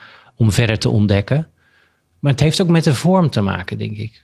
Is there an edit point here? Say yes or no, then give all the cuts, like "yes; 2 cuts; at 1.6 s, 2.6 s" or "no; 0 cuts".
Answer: no; 0 cuts